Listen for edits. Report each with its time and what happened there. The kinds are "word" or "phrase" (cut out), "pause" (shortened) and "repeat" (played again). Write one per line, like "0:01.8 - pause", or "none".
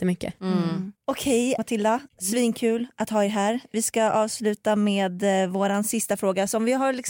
0:01.0 - pause
0:01.6 - word
0:02.1 - pause

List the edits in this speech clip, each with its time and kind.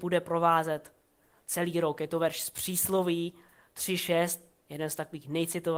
none

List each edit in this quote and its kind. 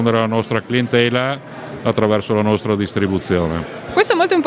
none

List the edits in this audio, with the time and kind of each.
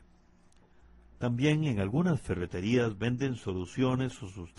none

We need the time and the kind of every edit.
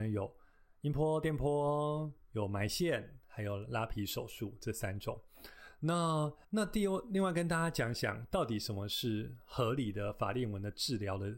0:06.4 - pause

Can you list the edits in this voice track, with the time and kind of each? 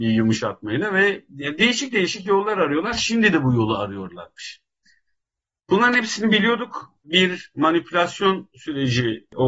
none

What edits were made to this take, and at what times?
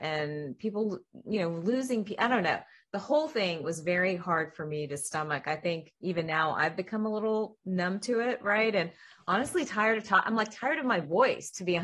none

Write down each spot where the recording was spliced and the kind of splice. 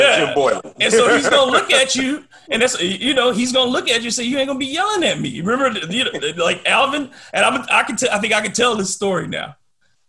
none

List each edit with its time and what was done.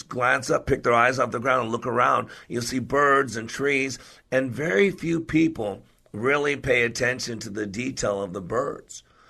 none

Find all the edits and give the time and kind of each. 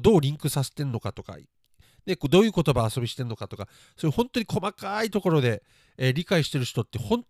none

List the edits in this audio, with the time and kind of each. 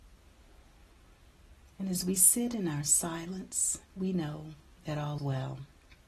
0:03.8 - pause
0:05.2 - word

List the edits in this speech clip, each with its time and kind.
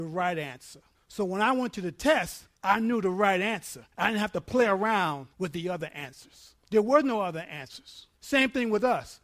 0:00.9 - pause
0:02.5 - pause
0:03.9 - pause
0:05.3 - pause
0:06.6 - pause
0:08.1 - pause

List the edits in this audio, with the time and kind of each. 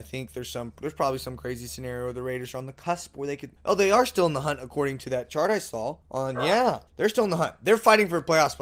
0:03.6 - pause
0:06.0 - pause
0:06.9 - pause

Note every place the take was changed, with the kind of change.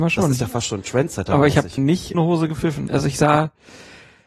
0:01.8 - phrase
0:02.1 - word

